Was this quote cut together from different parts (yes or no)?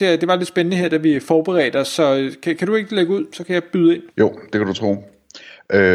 yes